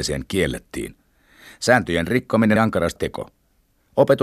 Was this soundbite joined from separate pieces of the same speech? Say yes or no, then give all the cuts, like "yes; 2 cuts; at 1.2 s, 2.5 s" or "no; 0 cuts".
yes; 2 cuts; at 2.6 s, 3.0 s